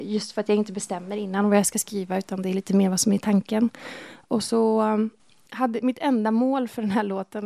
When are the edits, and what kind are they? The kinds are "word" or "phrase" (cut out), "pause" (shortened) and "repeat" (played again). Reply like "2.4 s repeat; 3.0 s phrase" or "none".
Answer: none

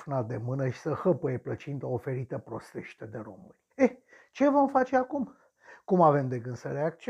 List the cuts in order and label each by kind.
3.7 s pause

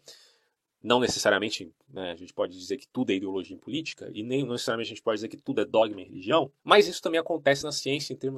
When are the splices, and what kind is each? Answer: 6.6 s pause

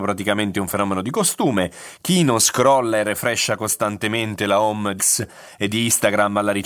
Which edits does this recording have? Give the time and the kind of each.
5.0 s word

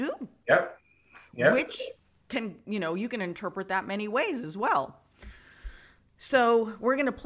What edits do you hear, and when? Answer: 2.1 s pause

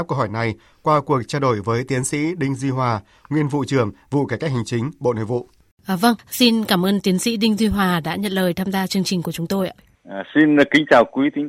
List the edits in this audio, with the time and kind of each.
none

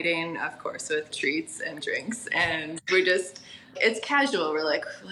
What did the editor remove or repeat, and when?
1.1 s word; 1.8 s word; 3.8 s word

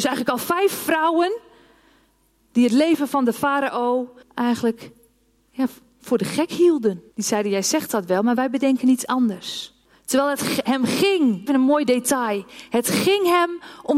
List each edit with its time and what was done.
4.2 s pause; 7.1 s pause; 9.8 s pause; 11.5 s word

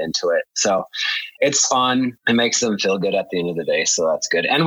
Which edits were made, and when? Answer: 2.2 s pause

